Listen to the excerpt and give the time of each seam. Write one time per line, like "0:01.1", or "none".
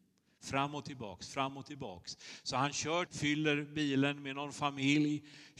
0:03.1